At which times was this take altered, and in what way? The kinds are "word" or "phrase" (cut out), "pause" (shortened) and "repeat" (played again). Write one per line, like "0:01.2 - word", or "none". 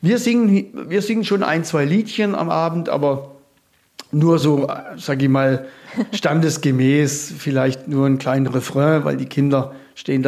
none